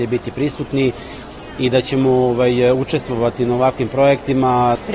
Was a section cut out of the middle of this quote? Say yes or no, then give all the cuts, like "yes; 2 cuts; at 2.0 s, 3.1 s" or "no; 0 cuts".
no; 0 cuts